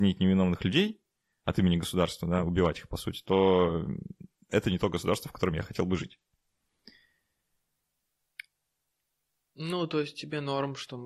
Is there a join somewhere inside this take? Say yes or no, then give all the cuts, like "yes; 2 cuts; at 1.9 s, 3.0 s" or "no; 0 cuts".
no; 0 cuts